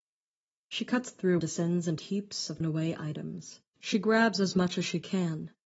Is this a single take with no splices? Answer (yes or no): no